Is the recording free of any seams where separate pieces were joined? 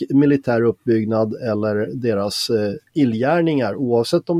yes; 0 cuts

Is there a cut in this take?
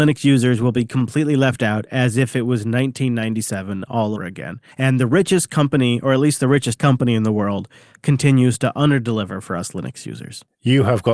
yes; 3 cuts; at 4.2 s, 4.7 s, 6.8 s

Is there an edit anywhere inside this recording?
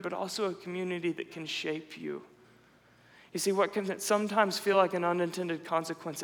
no; 0 cuts

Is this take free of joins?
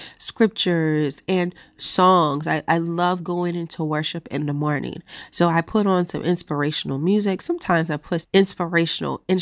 no; 1 cut; at 8.2 s

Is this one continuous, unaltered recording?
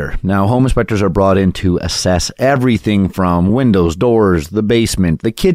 yes; 0 cuts

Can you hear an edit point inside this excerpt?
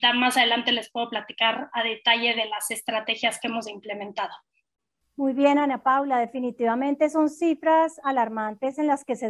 no; 0 cuts

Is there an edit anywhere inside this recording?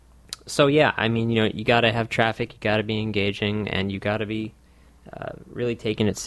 no; 0 cuts

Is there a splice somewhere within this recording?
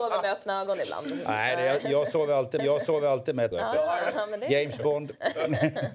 yes; 2 cuts; at 2.6 s, 3.5 s

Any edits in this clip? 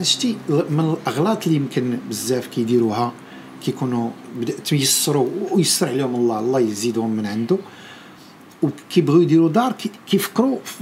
no; 0 cuts

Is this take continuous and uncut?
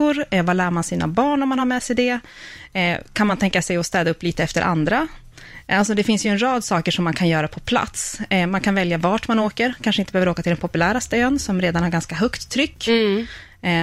yes; 0 cuts

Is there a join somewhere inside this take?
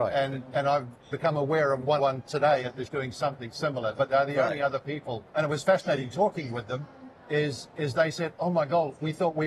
yes; 4 cuts; at 1.1 s, 2.0 s, 2.9 s, 5.3 s

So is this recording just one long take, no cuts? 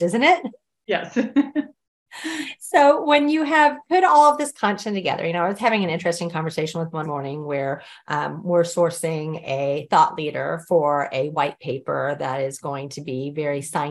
no; 1 cut; at 7.0 s

